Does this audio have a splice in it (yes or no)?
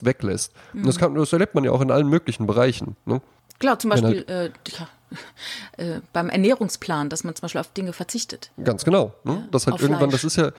yes